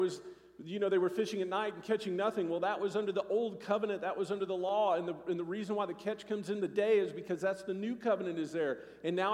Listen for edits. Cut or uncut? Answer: uncut